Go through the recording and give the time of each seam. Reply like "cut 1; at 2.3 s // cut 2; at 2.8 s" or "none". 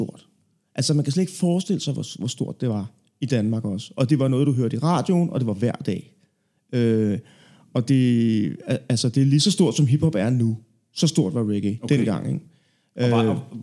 none

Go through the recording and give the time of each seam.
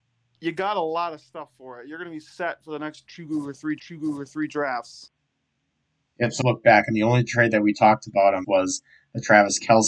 cut 1; at 3.8 s // cut 2; at 6.4 s // cut 3; at 8.4 s

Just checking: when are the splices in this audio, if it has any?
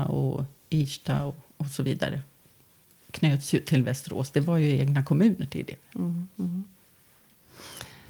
none

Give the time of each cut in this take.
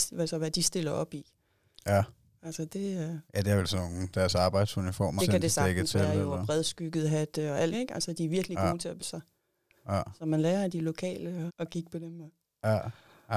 cut 1; at 3.3 s // cut 2; at 4.1 s // cut 3; at 5.2 s // cut 4; at 7.7 s // cut 5; at 9.0 s // cut 6; at 11.5 s

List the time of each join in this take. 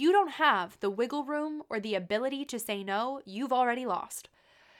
none

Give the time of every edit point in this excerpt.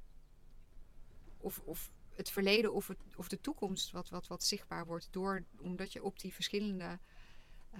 cut 1; at 4.1 s

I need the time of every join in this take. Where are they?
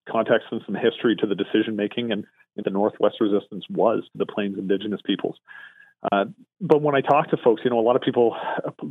cut 1; at 2.6 s // cut 2; at 4.1 s

